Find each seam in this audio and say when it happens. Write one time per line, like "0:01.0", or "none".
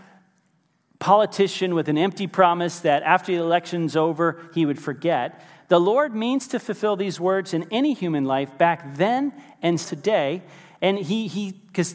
0:09.8